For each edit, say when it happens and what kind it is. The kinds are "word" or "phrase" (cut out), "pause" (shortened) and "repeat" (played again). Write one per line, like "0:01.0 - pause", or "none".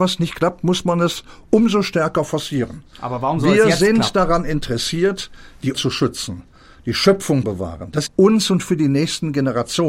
0:05.7 - word
0:07.4 - word
0:08.1 - phrase